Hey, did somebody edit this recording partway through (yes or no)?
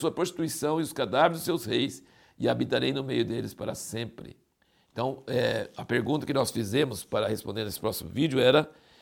no